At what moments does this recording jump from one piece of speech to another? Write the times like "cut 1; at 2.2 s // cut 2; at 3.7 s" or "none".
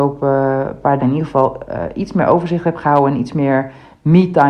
cut 1; at 1.0 s

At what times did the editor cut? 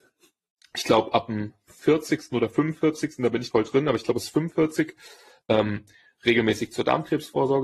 cut 1; at 3.5 s

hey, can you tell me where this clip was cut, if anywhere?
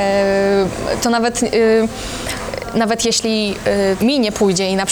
cut 1; at 4.0 s

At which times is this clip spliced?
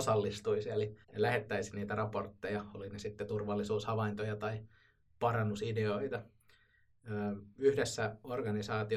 cut 1; at 1.0 s

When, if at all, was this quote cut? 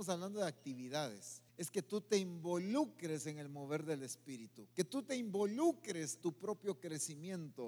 cut 1; at 1.5 s // cut 2; at 4.7 s // cut 3; at 6.2 s

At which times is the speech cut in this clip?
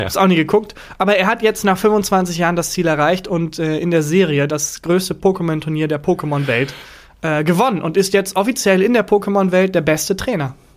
none

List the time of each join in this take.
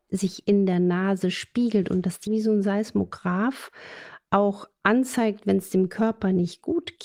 cut 1; at 2.3 s

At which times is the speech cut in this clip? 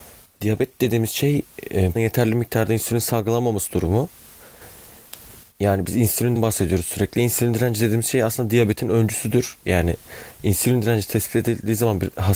cut 1; at 1.9 s // cut 2; at 6.3 s

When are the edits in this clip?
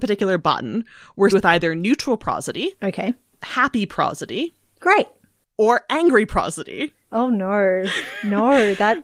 cut 1; at 1.3 s // cut 2; at 7.0 s

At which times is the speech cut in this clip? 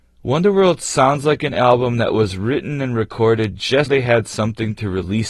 cut 1; at 3.9 s

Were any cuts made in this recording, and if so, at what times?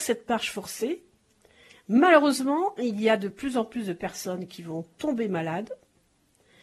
none

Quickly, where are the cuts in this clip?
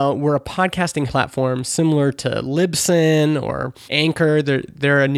cut 1; at 1.1 s // cut 2; at 3.9 s

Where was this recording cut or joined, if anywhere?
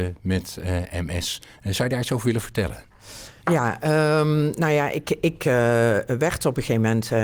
cut 1; at 3.4 s

